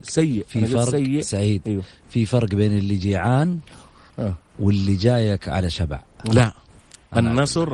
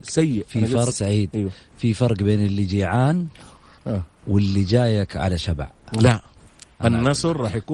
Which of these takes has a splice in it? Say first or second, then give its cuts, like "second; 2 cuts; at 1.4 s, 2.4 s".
second; 1 cut; at 0.9 s